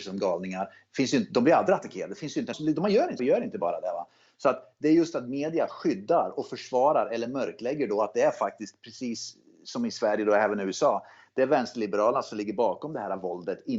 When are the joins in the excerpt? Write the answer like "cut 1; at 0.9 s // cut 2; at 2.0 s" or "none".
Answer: cut 1; at 2.5 s // cut 2; at 3.2 s